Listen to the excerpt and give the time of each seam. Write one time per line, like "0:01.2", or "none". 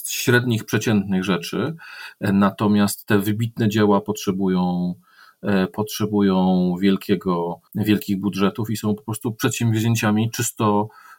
0:07.7

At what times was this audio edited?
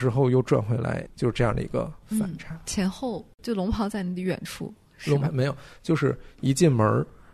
0:01.1

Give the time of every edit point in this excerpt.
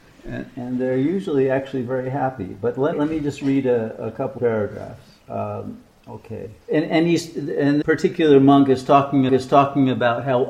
0:02.9
0:04.4
0:05.2
0:06.6
0:07.8
0:09.3

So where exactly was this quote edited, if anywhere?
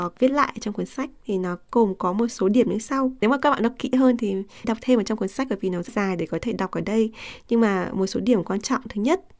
0:03.2
0:04.6
0:05.9

